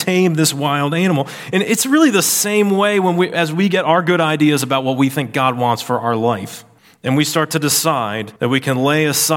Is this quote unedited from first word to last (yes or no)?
no